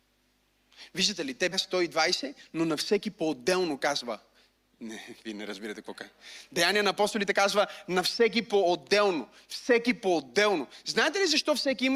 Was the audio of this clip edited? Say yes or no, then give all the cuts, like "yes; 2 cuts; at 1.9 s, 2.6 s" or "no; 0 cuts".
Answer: yes; 2 cuts; at 1.5 s, 4.5 s